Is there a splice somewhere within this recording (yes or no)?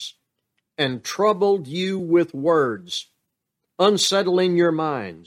no